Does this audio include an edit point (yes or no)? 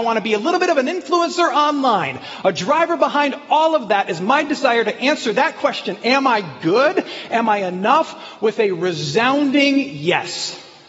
no